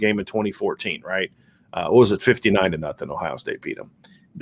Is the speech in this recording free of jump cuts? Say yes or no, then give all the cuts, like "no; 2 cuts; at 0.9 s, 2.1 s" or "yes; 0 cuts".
yes; 0 cuts